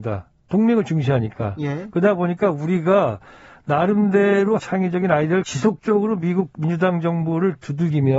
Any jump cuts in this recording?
yes; 2 cuts; at 4.6 s, 5.4 s

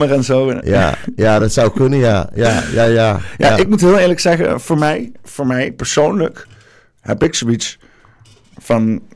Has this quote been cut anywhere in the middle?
no; 0 cuts

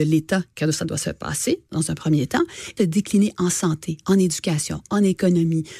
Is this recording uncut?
no; 1 cut; at 2.8 s

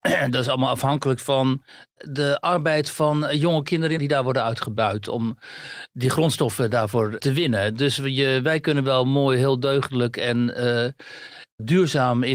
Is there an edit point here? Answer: yes; 1 cut; at 4.0 s

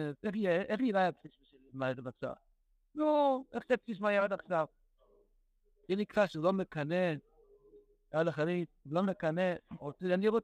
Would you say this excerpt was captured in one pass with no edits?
yes; 0 cuts

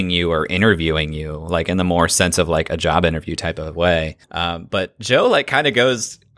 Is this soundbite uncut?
no; 1 cut; at 4.2 s

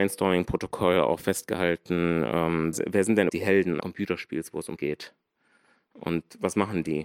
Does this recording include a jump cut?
yes; 4 cuts; at 2.7 s, 3.3 s, 3.8 s, 4.8 s

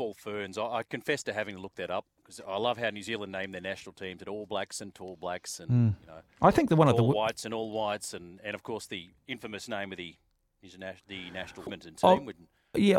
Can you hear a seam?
yes; 1 cut; at 11.7 s

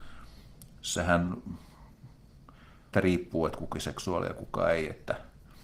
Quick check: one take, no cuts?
no; 2 cuts; at 2.9 s, 3.7 s

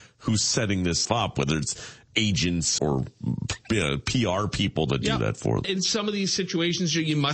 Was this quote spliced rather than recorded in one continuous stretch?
yes; 3 cuts; at 1.0 s, 2.8 s, 5.6 s

